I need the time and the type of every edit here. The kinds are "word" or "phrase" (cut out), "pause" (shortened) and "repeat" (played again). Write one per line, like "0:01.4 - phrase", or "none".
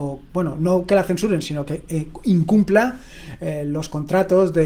none

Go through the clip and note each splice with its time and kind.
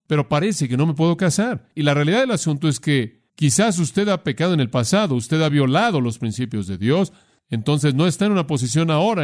0:03.3 - pause

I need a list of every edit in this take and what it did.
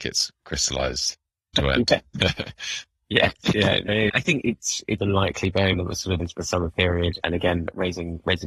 0:01.5 - word
0:04.4 - word
0:05.0 - word
0:05.7 - word
0:06.2 - word
0:07.2 - word

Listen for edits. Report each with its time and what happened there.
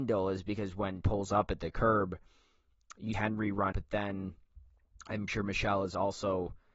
0:01.0 - word
0:03.1 - word
0:03.7 - word
0:05.3 - word

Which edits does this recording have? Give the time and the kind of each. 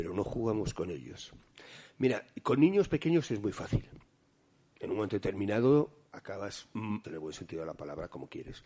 0:07.0 - word

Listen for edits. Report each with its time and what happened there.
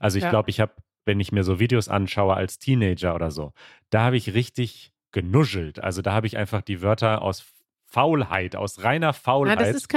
none

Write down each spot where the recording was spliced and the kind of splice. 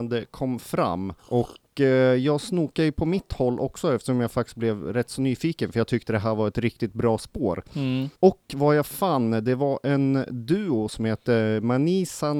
0:01.2 - pause
0:08.2 - pause

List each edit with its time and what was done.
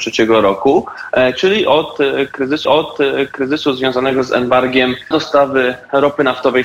0:02.6 - repeat
0:05.1 - word

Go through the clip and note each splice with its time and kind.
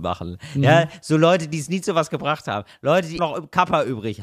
0:03.2 - word

